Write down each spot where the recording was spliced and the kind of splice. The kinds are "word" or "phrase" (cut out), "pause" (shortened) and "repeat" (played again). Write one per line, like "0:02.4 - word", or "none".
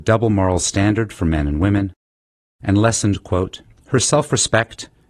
none